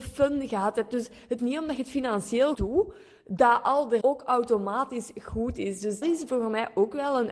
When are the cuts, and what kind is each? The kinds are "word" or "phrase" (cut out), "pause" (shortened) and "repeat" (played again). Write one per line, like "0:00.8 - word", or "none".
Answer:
0:01.4 - word
0:02.5 - word
0:04.0 - word
0:06.0 - word